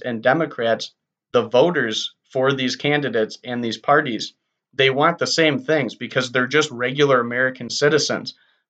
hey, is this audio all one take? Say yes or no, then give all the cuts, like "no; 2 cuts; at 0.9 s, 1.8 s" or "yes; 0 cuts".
yes; 0 cuts